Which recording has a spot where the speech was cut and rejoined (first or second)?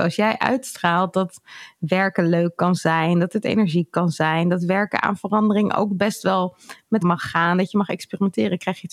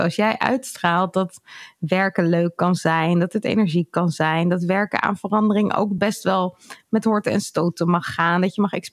first